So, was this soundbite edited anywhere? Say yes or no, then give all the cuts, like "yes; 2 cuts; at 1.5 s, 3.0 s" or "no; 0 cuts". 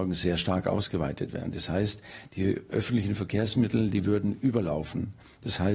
no; 0 cuts